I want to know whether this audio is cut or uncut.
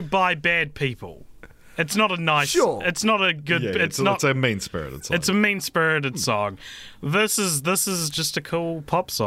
uncut